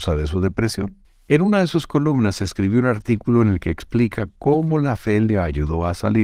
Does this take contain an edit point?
yes; 1 cut; at 1.0 s

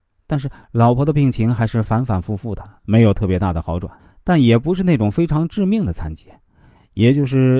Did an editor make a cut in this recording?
yes; 2 cuts; at 2.8 s, 4.0 s

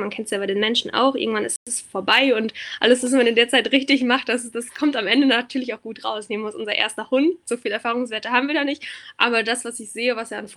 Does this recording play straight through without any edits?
yes; 0 cuts

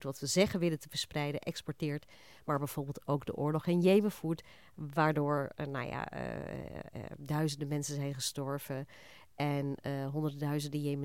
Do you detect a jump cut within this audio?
no; 0 cuts

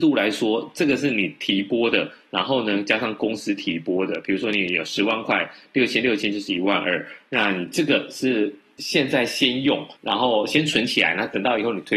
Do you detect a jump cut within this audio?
yes; 1 cut; at 10.0 s

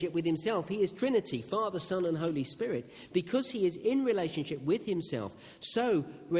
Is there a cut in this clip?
no; 0 cuts

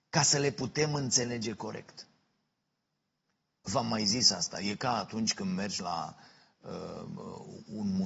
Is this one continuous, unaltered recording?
yes; 0 cuts

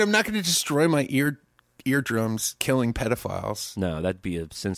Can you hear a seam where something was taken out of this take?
no; 0 cuts

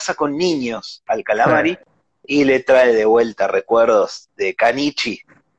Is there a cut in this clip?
no; 0 cuts

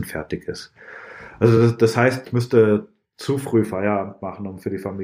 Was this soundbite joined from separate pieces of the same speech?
no; 0 cuts

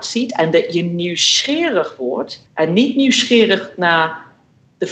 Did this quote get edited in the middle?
yes; 1 cut; at 2.5 s

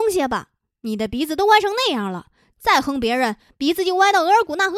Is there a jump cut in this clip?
no; 0 cuts

